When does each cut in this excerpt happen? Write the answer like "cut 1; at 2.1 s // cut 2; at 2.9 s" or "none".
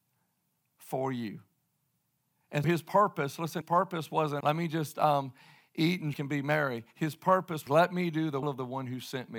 cut 1; at 2.6 s // cut 2; at 3.6 s // cut 3; at 4.4 s // cut 4; at 6.1 s // cut 5; at 7.7 s // cut 6; at 8.4 s